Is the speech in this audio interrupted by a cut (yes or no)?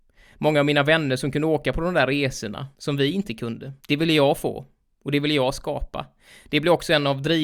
yes